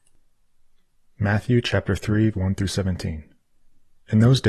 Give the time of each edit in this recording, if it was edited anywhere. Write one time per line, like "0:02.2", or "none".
0:02.3